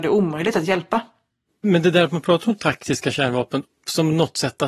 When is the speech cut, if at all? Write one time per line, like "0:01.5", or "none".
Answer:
none